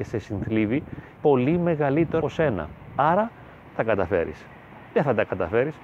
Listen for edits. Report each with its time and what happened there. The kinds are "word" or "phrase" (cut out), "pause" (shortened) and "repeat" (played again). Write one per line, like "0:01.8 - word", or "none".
0:01.2 - word
0:02.2 - word
0:03.8 - phrase